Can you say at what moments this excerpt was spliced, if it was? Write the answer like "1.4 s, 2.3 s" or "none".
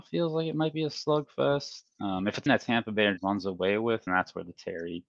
2.5 s, 3.2 s, 4.1 s